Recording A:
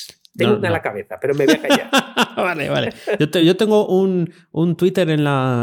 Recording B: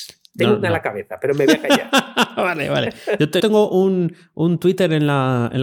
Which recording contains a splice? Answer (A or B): B